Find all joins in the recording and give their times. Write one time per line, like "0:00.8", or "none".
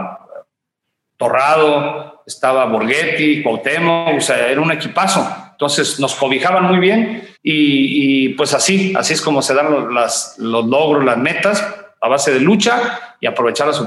0:07.3